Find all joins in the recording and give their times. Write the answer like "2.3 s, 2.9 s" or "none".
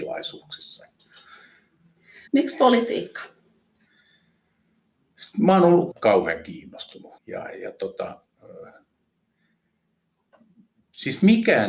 2.3 s, 5.9 s, 7.2 s